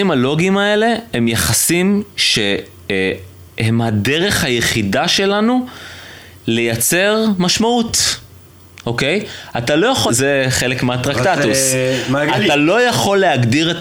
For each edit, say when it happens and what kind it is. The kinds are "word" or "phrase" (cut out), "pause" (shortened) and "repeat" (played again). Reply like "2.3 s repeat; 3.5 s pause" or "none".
10.1 s word